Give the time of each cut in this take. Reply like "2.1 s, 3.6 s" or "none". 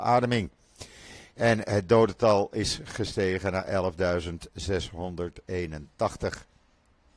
none